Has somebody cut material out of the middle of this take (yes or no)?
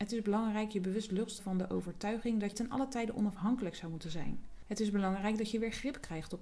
yes